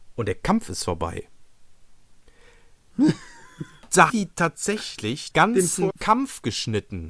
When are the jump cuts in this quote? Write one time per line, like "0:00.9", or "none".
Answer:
0:04.1
0:05.3
0:05.9